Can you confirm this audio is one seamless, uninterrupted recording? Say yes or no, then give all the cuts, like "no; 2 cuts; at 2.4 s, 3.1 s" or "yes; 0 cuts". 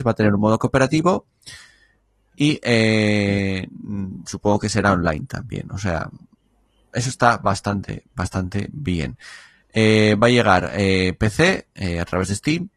yes; 0 cuts